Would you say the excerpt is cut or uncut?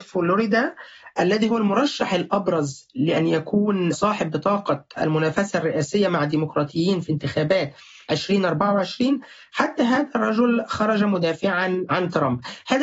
uncut